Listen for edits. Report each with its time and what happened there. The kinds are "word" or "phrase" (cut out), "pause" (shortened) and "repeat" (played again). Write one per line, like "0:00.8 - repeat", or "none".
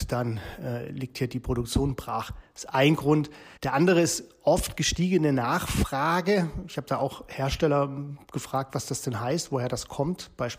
0:03.6 - pause